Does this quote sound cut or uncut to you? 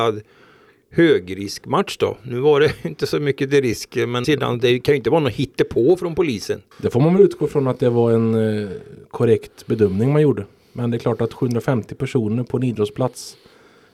cut